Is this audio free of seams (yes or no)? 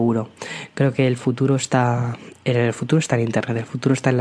yes